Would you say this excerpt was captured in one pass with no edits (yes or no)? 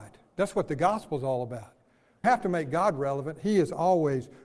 no